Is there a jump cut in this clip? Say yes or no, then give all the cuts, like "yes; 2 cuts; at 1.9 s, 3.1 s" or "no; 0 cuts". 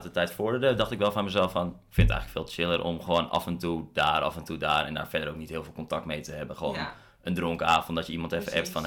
no; 0 cuts